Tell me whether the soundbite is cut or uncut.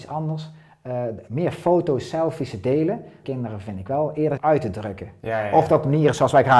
cut